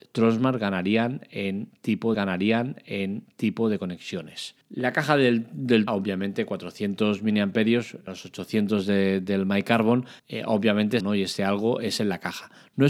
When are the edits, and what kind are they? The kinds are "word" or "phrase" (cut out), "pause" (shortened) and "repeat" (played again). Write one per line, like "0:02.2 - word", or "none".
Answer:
0:02.1 - repeat
0:04.6 - pause
0:05.9 - phrase
0:08.1 - phrase
0:10.2 - pause
0:11.0 - phrase

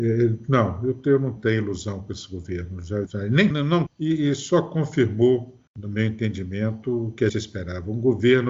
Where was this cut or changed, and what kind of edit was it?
0:01.4 - phrase
0:03.1 - word
0:03.5 - word
0:03.9 - word
0:05.7 - pause
0:07.3 - word

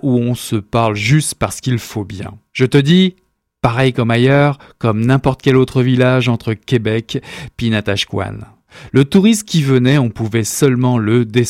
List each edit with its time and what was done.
none

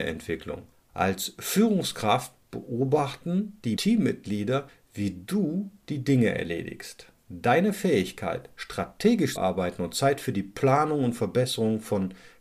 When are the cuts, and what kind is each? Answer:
0:03.8 - phrase
0:09.4 - word

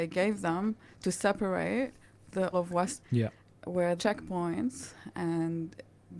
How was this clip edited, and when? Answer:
0:02.5 - word
0:03.0 - word
0:04.0 - word

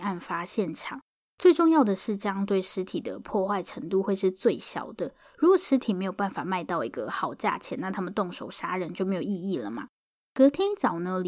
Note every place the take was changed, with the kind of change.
none

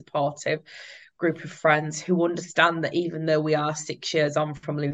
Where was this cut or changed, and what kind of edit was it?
none

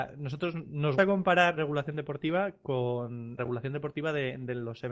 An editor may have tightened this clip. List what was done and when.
0:01.0 - word
0:01.6 - word
0:03.4 - word

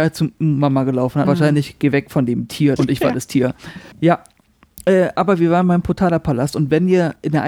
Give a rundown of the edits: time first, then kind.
0:01.2 - word
0:02.8 - word
0:03.9 - pause

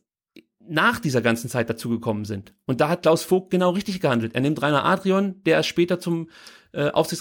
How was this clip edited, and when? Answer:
none

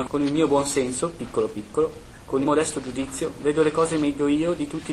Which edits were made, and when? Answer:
0:02.4 - word

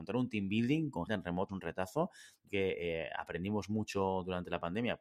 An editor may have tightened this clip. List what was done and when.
0:01.1 - word
0:01.5 - word
0:02.5 - word

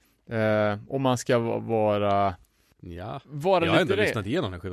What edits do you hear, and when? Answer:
none

